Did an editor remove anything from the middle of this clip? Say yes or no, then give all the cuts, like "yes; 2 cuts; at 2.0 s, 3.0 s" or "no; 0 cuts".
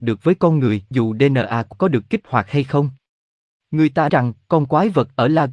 yes; 3 cuts; at 0.9 s, 1.7 s, 4.1 s